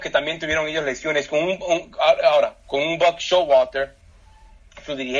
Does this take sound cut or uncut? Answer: uncut